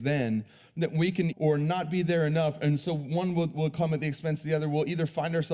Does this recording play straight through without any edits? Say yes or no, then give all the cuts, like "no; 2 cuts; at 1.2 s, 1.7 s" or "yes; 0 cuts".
no; 1 cut; at 1.3 s